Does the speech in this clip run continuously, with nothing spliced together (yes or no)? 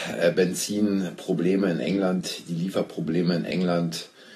yes